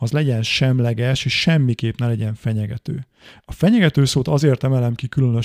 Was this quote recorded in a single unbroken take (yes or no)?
yes